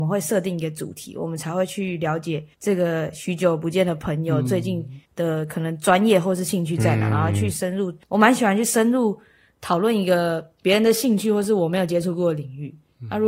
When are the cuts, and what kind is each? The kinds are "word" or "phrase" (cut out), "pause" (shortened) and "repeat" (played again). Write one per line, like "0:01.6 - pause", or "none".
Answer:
0:02.5 - pause
0:05.0 - pause
0:08.0 - pause